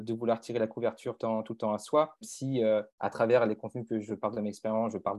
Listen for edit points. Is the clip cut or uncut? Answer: cut